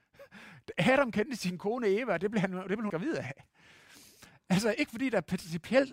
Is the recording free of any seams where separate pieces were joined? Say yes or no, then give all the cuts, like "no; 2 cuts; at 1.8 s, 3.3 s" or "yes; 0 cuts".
no; 1 cut; at 2.9 s